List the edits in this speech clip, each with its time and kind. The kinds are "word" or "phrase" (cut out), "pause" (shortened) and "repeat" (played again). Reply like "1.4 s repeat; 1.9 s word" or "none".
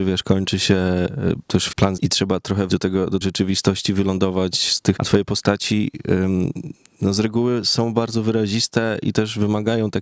2.0 s word; 2.7 s word; 3.2 s word; 5.0 s word